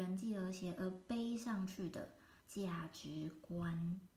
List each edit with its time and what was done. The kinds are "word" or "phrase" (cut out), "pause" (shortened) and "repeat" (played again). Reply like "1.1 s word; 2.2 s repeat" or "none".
2.4 s pause